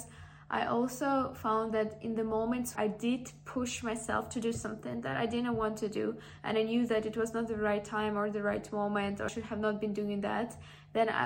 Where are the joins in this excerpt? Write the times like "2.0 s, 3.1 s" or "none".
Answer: 2.8 s, 9.3 s